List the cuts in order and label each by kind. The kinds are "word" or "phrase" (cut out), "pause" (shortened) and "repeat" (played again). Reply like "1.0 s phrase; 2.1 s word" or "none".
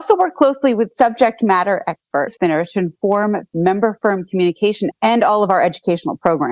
2.4 s phrase; 3.5 s word; 4.9 s word